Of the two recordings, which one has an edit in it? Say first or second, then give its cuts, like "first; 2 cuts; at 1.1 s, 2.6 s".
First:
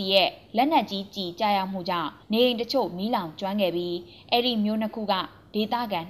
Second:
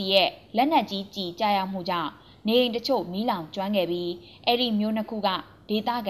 first; 1 cut; at 2.2 s